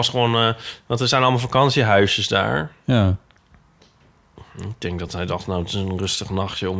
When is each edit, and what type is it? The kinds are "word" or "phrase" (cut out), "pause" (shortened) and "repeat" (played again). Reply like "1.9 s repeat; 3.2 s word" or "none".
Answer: none